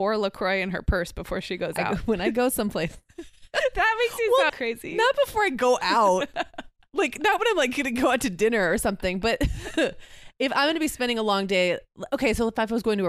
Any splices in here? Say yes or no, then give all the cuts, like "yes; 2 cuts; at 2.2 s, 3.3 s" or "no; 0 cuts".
yes; 1 cut; at 4.5 s